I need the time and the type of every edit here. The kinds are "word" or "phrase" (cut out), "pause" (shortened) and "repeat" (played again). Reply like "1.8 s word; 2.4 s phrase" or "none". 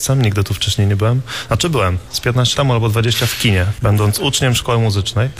2.5 s word